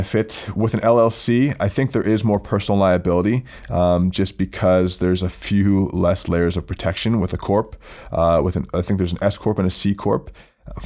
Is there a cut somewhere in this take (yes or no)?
no